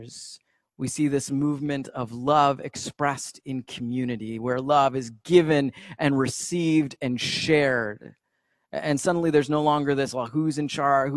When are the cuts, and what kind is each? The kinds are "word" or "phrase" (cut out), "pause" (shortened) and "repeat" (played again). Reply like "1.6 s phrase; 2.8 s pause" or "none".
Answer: none